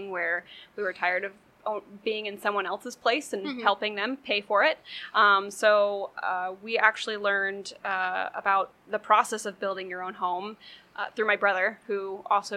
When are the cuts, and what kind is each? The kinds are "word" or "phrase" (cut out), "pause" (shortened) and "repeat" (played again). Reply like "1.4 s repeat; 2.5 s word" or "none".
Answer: 8.8 s pause